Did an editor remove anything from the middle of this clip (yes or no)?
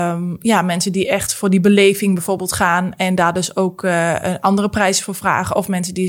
no